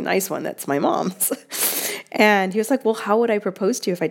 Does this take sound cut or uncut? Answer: uncut